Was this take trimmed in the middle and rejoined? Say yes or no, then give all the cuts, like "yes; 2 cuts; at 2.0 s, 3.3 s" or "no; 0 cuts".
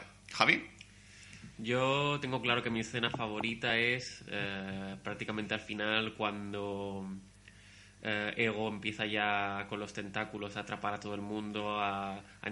no; 0 cuts